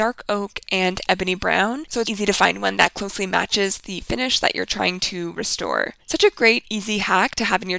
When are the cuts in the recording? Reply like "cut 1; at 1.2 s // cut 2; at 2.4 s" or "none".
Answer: cut 1; at 2.0 s